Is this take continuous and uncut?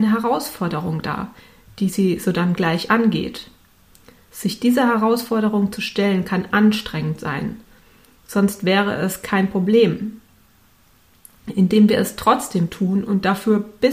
yes; 0 cuts

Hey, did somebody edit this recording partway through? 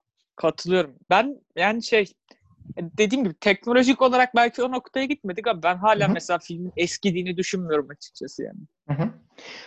yes; 1 cut; at 1.0 s

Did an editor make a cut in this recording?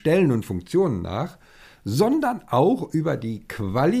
no; 0 cuts

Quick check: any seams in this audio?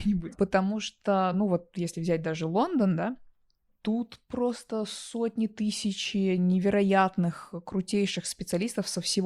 no; 0 cuts

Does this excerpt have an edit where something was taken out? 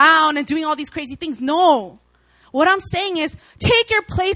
no; 0 cuts

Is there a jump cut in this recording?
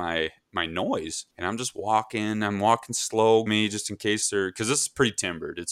yes; 2 cuts; at 1.3 s, 3.5 s

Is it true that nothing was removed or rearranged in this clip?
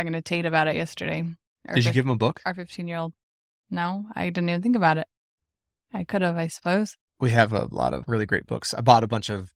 no; 1 cut; at 8.0 s

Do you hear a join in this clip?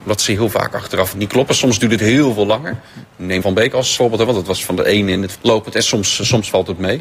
yes; 4 cuts; at 1.1 s, 3.4 s, 4.0 s, 5.3 s

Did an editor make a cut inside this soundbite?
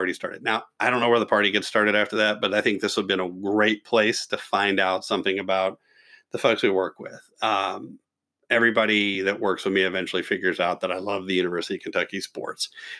no; 0 cuts

